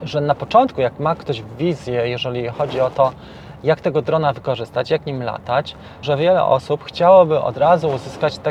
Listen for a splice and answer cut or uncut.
cut